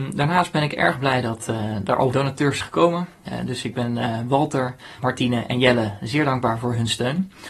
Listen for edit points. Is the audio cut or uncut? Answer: cut